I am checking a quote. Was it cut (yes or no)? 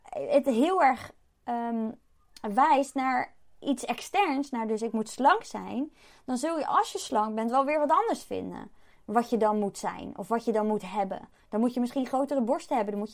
no